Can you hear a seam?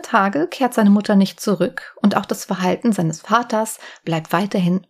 no; 0 cuts

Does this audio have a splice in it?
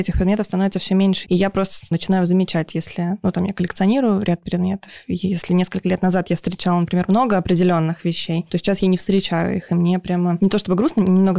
yes; 1 cut; at 1.2 s

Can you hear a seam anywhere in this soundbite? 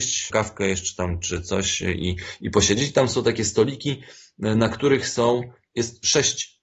no; 0 cuts

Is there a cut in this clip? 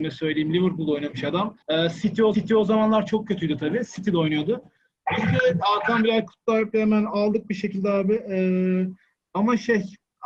yes; 2 cuts; at 1.6 s, 2.3 s

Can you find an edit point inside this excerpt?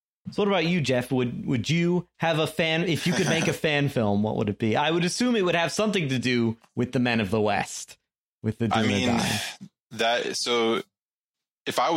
no; 0 cuts

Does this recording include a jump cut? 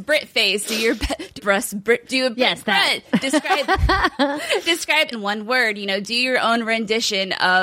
yes; 3 cuts; at 1.4 s, 2.0 s, 5.1 s

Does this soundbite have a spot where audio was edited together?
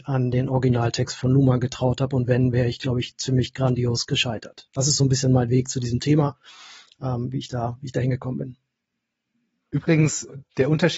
no; 0 cuts

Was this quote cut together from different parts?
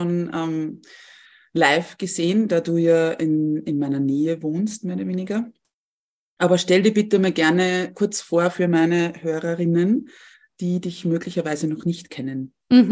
no; 0 cuts

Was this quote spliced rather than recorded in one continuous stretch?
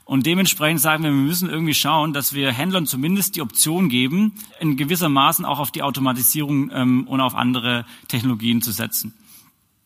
yes; 1 cut; at 4.5 s

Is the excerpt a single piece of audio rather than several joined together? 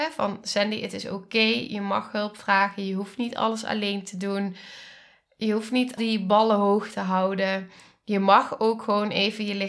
no; 1 cut; at 6.0 s

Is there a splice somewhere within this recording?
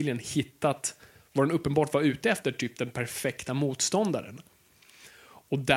no; 0 cuts

